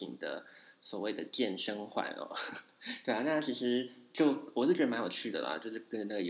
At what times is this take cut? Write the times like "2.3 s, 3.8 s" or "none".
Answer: none